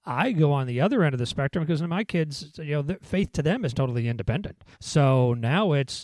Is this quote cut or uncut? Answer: cut